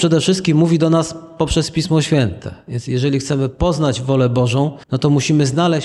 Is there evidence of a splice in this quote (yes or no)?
yes